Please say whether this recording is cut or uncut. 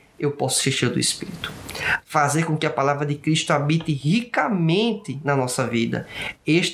uncut